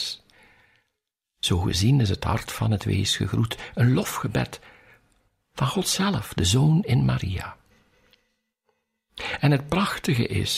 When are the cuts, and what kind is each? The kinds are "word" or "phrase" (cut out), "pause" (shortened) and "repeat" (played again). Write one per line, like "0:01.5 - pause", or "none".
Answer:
none